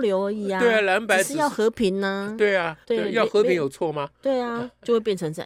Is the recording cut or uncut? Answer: cut